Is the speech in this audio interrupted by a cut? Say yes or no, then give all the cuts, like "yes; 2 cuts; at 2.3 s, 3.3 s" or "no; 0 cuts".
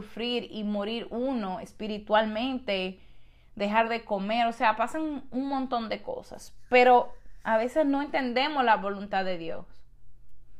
no; 0 cuts